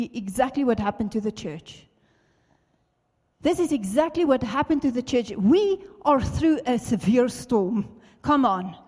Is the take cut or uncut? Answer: uncut